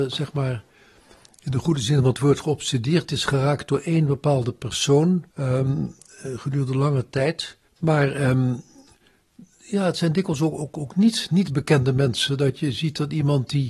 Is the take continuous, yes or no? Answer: no